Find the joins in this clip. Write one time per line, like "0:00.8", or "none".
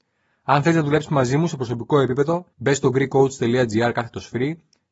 0:02.5

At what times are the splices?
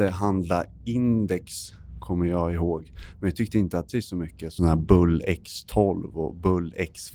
0:03.9
0:04.6

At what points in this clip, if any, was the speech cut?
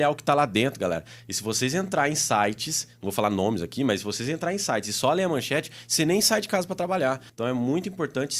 0:07.3

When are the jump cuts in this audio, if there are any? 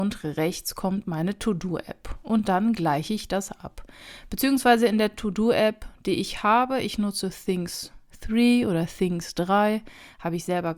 none

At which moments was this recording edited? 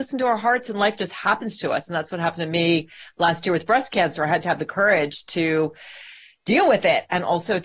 none

